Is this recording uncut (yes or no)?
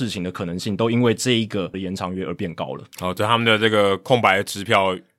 no